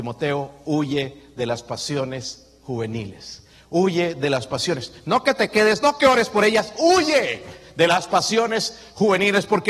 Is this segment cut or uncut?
uncut